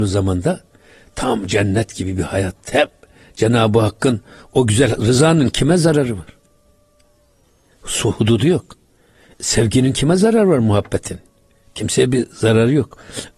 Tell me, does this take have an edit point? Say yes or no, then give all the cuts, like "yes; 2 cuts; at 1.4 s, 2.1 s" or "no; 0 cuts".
no; 0 cuts